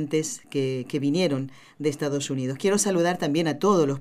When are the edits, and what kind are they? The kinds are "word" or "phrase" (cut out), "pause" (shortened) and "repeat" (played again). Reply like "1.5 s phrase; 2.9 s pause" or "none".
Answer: none